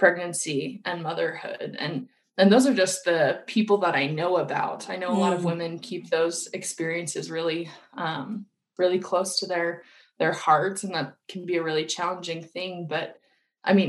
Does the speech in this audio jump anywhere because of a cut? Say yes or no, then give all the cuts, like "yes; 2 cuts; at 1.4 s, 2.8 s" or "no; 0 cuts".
no; 0 cuts